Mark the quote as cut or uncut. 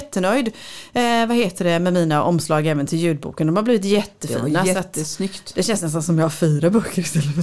uncut